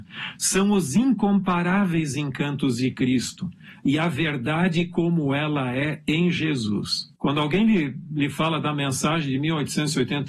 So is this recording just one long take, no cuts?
no; 1 cut; at 7.2 s

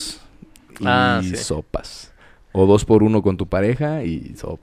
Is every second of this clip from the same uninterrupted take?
yes; 0 cuts

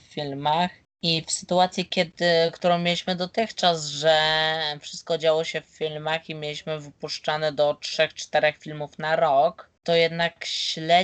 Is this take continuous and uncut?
yes; 0 cuts

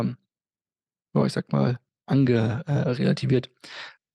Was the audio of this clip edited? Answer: no; 0 cuts

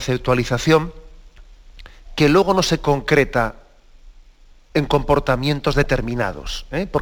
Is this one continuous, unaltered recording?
yes; 0 cuts

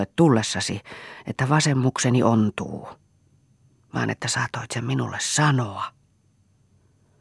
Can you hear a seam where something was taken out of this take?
no; 0 cuts

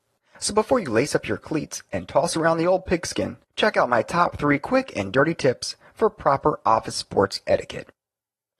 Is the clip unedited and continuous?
no; 1 cut; at 3.5 s

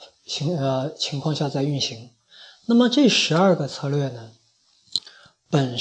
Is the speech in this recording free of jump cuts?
yes; 0 cuts

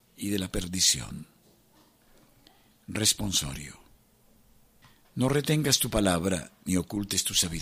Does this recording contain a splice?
no; 0 cuts

